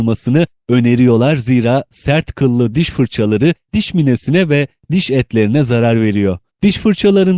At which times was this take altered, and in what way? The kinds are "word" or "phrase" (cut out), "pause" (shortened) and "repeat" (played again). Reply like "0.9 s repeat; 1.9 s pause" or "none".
none